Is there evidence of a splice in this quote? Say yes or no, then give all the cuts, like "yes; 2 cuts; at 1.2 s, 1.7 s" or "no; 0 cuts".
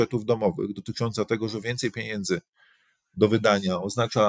no; 0 cuts